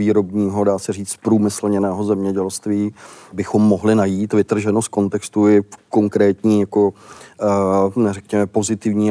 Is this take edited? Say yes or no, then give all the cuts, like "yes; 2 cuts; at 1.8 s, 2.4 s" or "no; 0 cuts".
no; 0 cuts